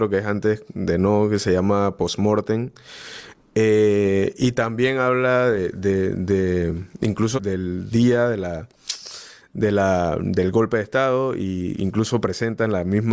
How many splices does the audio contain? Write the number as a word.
two